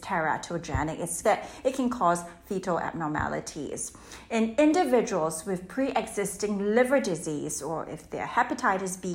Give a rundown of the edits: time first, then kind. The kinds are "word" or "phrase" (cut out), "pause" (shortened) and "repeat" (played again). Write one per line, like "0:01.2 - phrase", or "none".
0:01.2 - phrase